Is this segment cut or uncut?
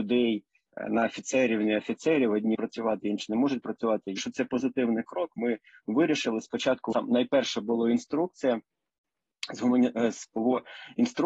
cut